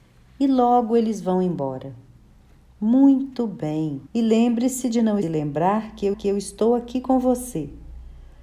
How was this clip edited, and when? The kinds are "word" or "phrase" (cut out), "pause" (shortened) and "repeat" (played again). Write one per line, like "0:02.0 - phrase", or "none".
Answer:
0:04.1 - pause
0:05.2 - phrase
0:06.1 - repeat